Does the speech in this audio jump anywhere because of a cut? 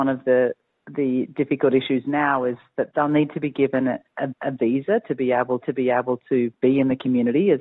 yes; 3 cuts; at 2.9 s, 4.3 s, 5.6 s

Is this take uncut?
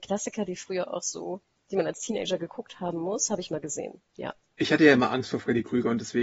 yes; 0 cuts

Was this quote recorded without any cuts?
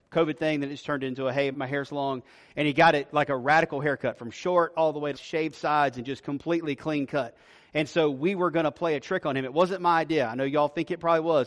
no; 2 cuts; at 1.5 s, 5.1 s

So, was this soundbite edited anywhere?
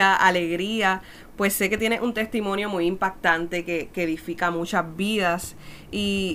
no; 0 cuts

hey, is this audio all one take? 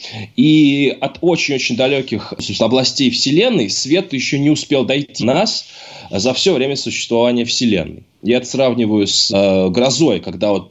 no; 3 cuts; at 4.1 s, 5.2 s, 9.3 s

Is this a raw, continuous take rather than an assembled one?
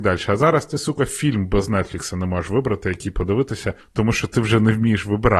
no; 1 cut; at 3.8 s

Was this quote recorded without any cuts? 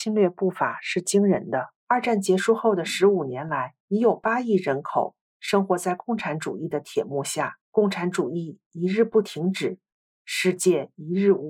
no; 3 cuts; at 1.8 s, 3.8 s, 7.6 s

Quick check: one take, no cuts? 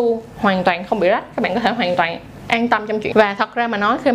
no; 1 cut; at 3.1 s

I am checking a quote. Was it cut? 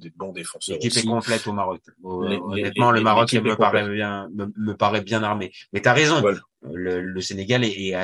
yes; 2 cuts; at 4.5 s, 7.0 s

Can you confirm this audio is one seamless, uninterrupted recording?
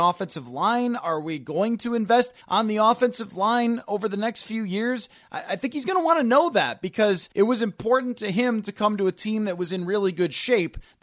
no; 2 cuts; at 2.4 s, 7.3 s

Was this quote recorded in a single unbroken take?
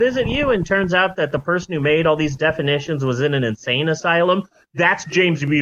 yes; 0 cuts

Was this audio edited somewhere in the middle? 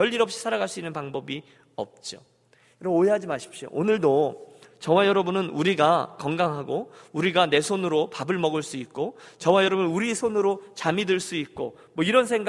no; 0 cuts

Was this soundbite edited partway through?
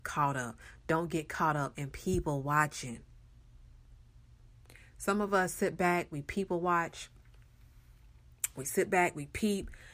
no; 0 cuts

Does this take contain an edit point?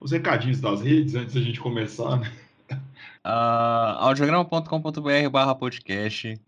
yes; 1 cut; at 3.2 s

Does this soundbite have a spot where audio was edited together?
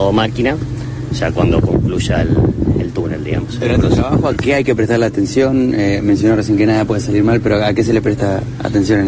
no; 0 cuts

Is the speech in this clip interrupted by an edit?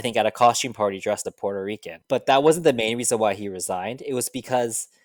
yes; 1 cut; at 1.2 s

